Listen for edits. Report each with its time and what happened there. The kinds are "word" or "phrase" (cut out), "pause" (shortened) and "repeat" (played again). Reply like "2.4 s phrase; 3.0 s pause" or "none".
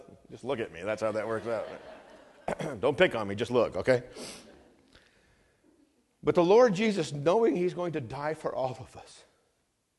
none